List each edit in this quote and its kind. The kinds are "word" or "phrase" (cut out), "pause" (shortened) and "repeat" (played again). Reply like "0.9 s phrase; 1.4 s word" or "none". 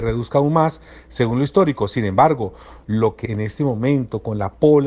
3.3 s word